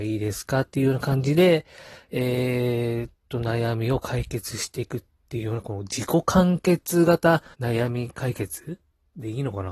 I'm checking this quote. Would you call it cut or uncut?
cut